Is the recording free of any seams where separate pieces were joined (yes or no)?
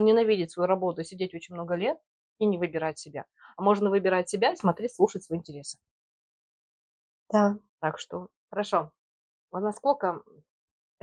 no